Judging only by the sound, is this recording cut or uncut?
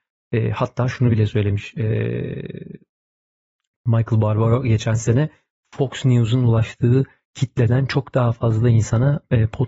uncut